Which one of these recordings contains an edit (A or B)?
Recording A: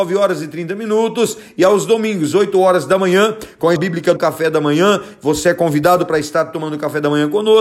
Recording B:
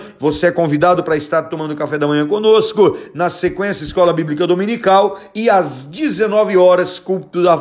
A